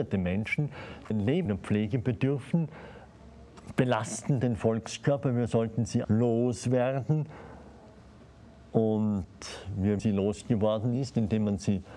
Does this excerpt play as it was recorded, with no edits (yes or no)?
no